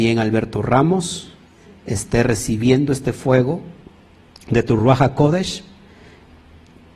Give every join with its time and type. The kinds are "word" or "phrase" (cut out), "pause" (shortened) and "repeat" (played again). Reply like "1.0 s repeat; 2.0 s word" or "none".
none

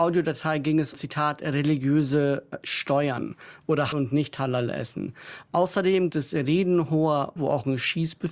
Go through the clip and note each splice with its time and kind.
0.9 s word; 3.9 s word; 6.1 s word; 7.4 s word

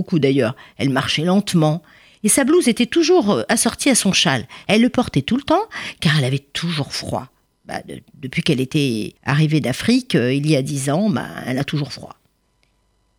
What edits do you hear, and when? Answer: 9.2 s pause

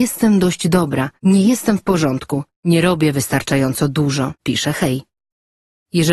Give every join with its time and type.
1.2 s pause; 2.5 s pause; 4.4 s pause

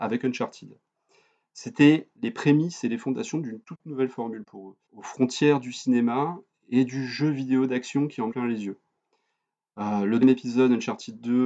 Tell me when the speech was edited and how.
2.1 s pause; 4.8 s pause; 8.3 s word; 10.2 s word

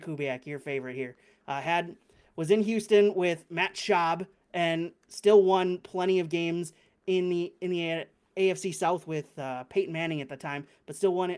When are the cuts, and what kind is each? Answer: none

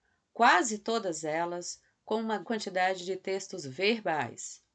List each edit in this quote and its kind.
2.4 s word

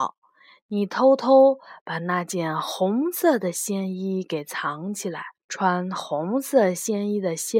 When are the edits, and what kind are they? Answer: 5.4 s pause

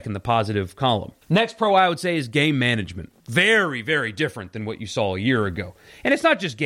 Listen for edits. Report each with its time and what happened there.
1.2 s pause; 3.2 s pause

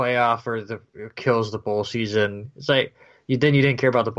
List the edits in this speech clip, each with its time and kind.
none

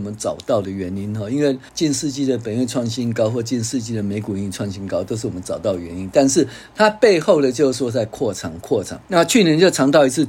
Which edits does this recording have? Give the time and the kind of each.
1.7 s pause; 9.0 s pause

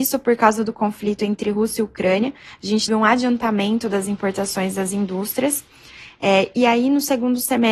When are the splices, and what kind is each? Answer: 2.9 s word

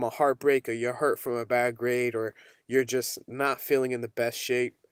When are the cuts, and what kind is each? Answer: none

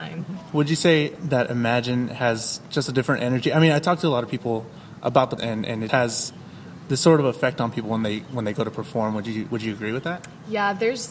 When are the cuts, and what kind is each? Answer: 5.4 s word; 5.9 s word

